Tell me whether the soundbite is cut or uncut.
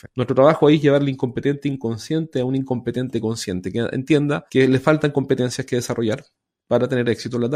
uncut